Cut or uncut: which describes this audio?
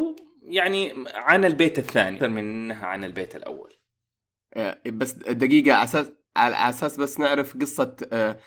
cut